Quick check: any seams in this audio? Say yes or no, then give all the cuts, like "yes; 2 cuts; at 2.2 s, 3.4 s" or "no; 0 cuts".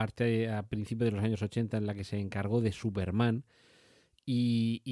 no; 0 cuts